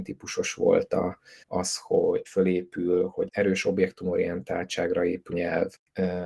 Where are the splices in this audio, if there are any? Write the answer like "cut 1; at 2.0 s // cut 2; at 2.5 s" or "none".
cut 1; at 1.4 s // cut 2; at 2.3 s // cut 3; at 3.3 s // cut 4; at 5.3 s

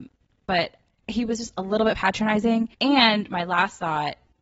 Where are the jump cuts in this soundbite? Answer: cut 1; at 2.7 s

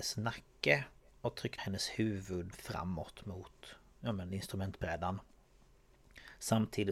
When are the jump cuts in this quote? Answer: cut 1; at 1.6 s // cut 2; at 2.5 s

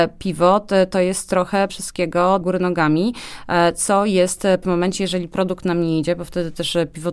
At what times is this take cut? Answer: cut 1; at 1.7 s // cut 2; at 2.4 s // cut 3; at 4.6 s

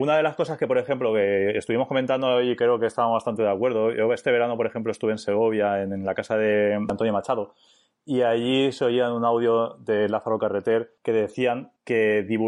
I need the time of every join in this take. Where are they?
none

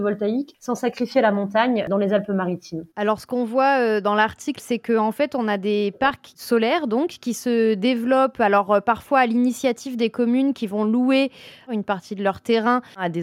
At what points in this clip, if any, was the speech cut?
cut 1; at 2.9 s

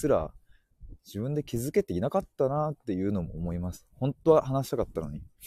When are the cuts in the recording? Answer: cut 1; at 1.0 s

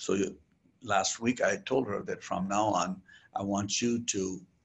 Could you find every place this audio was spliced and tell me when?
none

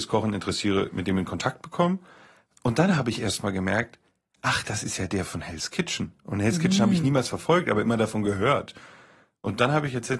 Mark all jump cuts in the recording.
none

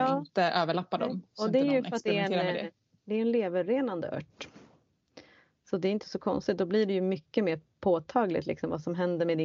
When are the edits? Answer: none

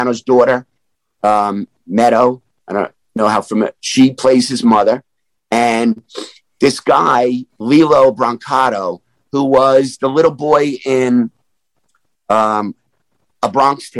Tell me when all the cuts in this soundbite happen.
cut 1; at 7.5 s

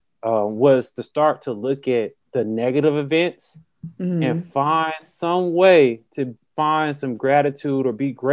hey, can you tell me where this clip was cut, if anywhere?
cut 1; at 2.2 s // cut 2; at 6.1 s

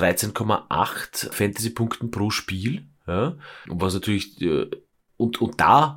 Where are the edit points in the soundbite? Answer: cut 1; at 1.3 s // cut 2; at 3.7 s

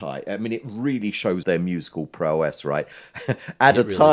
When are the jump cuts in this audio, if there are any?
cut 1; at 1.4 s

